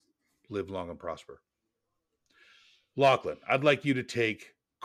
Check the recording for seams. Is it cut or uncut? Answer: uncut